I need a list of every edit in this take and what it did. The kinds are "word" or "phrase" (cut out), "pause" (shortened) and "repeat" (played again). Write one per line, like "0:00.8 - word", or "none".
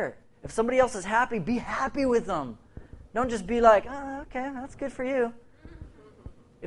none